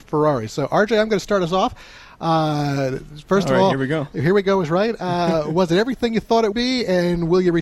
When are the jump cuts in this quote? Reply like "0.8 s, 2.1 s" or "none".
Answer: 6.5 s